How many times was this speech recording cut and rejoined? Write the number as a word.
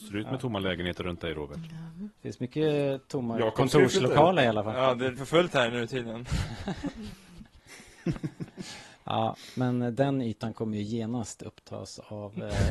two